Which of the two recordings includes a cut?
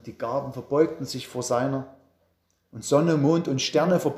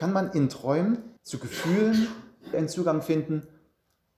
second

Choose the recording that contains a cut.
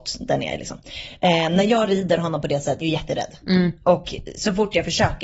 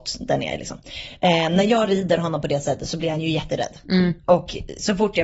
first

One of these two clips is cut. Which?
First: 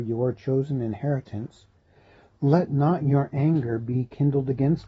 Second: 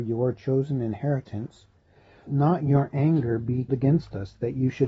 second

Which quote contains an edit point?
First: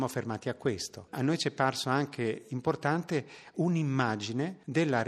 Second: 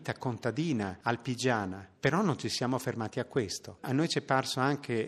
first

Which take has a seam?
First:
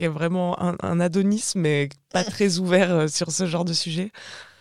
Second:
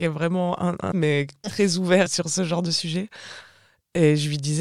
second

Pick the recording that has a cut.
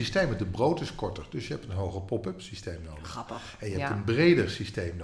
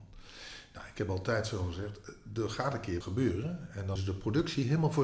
second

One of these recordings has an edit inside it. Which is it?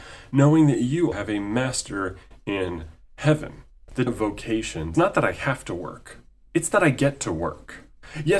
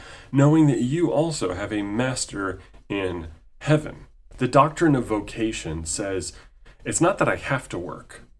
first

